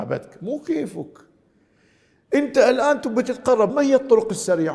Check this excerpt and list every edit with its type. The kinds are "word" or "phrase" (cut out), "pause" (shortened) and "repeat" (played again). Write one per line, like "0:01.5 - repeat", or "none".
0:03.7 - word